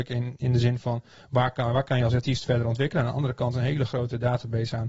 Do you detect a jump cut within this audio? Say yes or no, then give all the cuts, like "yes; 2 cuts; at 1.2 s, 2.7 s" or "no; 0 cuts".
no; 0 cuts